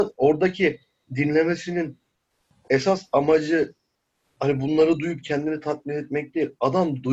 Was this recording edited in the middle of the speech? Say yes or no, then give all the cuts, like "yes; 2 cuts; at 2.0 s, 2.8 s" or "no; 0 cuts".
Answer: no; 0 cuts